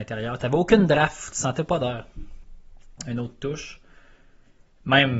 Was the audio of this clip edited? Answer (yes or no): no